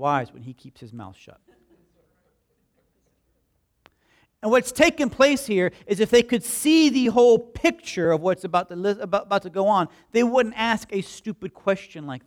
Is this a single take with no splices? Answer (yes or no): yes